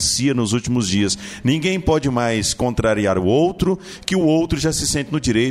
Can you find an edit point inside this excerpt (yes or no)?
no